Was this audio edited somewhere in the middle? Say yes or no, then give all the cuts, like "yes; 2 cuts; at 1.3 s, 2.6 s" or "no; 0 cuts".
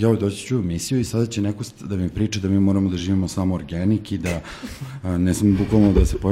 no; 0 cuts